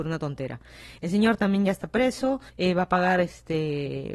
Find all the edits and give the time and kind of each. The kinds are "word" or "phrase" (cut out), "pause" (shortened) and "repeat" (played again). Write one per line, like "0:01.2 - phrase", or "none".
0:02.5 - pause